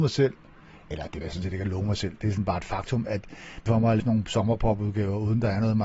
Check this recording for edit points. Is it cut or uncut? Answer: cut